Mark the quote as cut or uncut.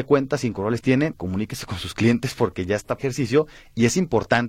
cut